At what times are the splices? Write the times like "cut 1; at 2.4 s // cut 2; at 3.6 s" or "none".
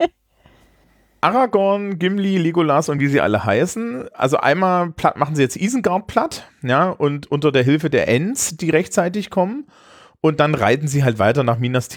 none